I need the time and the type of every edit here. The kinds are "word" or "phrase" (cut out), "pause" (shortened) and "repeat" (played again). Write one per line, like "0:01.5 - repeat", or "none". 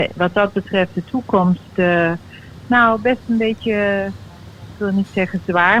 none